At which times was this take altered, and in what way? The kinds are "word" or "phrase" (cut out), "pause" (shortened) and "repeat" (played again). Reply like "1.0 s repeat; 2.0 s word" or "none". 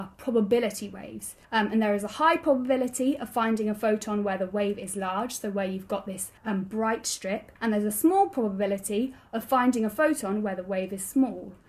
1.4 s pause; 6.4 s pause; 7.6 s pause